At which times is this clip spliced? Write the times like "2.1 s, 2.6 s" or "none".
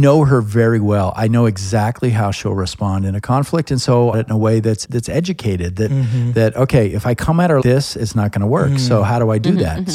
4.1 s, 4.8 s, 7.6 s